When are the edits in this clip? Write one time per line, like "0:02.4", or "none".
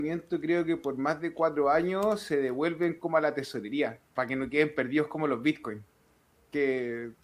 0:04.1